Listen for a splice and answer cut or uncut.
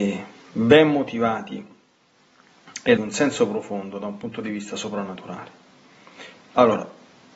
cut